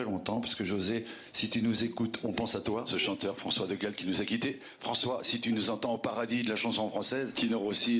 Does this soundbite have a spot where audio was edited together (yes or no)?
no